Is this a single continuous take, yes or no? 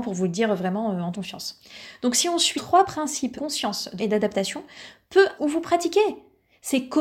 no